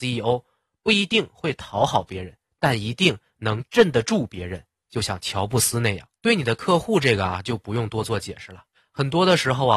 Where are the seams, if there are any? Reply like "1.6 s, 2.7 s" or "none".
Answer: 6.2 s, 8.7 s